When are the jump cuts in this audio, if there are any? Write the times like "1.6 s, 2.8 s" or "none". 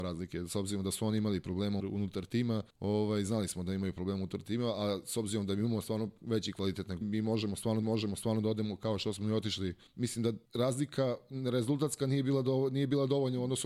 1.8 s, 2.7 s, 7.0 s, 7.8 s, 9.9 s, 10.5 s

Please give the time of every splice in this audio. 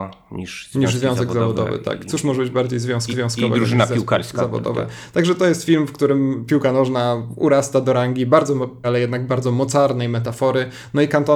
3.1 s, 8.8 s

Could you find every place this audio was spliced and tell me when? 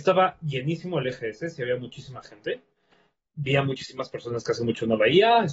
none

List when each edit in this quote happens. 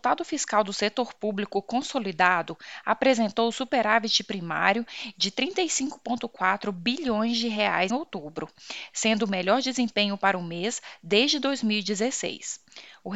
7.9 s

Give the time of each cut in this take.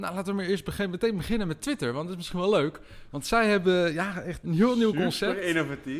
none

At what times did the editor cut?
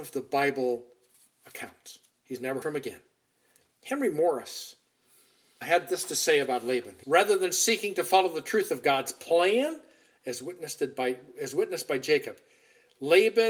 2.6 s, 5.6 s, 7.0 s

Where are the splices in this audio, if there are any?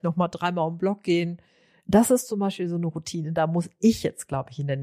none

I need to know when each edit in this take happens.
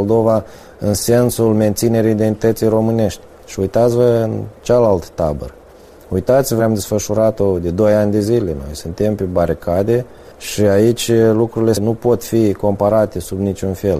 6.6 s

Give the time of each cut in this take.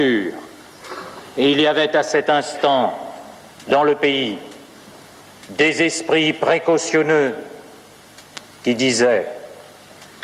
none

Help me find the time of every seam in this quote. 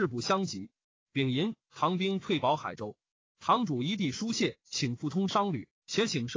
none

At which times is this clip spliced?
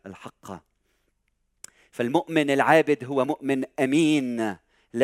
none

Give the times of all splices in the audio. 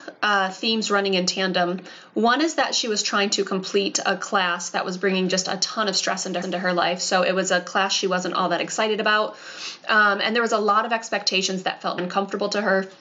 6.4 s, 12.0 s

